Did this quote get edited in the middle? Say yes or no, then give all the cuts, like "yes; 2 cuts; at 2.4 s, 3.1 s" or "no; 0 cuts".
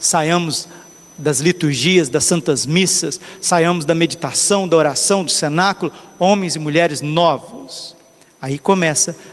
no; 0 cuts